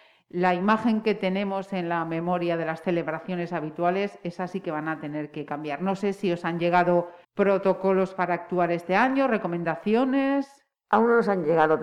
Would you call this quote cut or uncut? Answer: cut